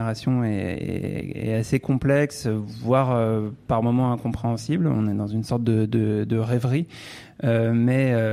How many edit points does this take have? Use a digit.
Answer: 0